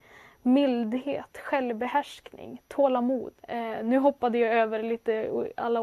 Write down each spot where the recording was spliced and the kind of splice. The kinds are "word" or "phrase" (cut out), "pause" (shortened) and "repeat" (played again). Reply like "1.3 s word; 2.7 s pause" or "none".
3.4 s pause